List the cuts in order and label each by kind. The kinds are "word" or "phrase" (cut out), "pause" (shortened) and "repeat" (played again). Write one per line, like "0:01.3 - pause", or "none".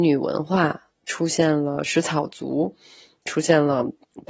none